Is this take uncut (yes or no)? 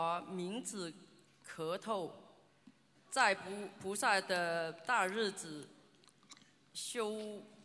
no